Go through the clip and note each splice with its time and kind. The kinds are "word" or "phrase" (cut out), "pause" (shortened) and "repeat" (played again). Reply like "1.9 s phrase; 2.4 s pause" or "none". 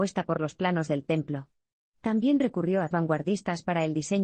2.9 s word